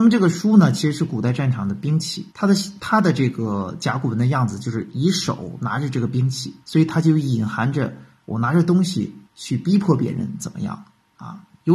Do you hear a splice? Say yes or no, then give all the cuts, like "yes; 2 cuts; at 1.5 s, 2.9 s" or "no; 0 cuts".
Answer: yes; 3 cuts; at 2.3 s, 6.6 s, 9.3 s